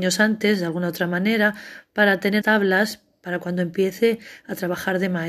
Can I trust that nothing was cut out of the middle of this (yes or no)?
no